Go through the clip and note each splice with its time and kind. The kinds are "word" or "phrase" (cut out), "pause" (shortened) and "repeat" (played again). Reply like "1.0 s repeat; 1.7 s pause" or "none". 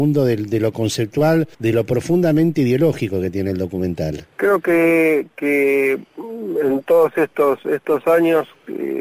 1.5 s pause; 4.3 s pause

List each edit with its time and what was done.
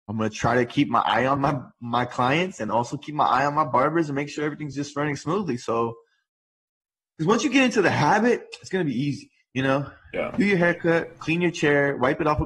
none

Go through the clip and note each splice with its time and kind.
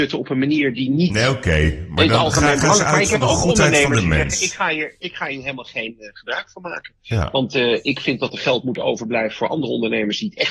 none

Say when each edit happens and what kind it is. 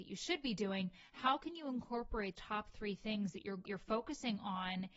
2.3 s word; 3.7 s word

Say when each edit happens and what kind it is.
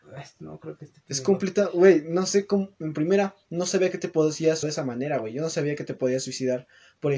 4.6 s word

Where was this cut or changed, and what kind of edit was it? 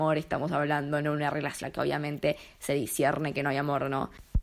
1.6 s word

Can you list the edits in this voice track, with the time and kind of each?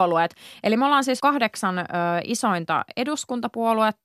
1.2 s word

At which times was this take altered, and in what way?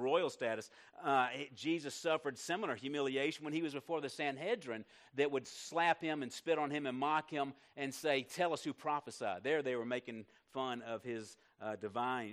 none

